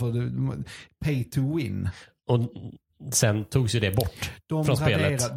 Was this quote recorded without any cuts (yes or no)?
yes